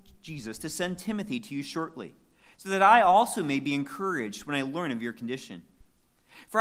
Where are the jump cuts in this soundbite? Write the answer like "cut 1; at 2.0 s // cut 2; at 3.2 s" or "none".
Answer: none